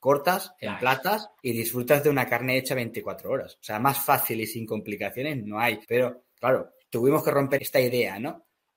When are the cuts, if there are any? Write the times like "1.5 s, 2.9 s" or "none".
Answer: 1.4 s, 5.8 s, 6.8 s, 7.6 s